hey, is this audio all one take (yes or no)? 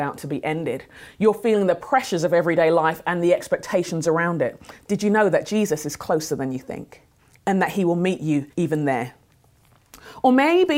no